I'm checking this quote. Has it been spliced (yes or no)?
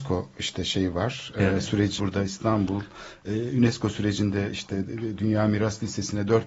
yes